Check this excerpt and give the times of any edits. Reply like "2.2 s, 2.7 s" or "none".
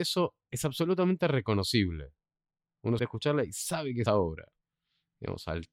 3.0 s, 4.1 s